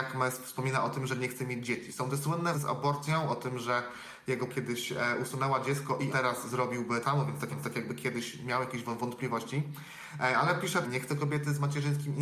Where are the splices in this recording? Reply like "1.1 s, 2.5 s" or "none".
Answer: 2.5 s, 4.5 s, 6.1 s, 7.0 s, 7.5 s, 10.8 s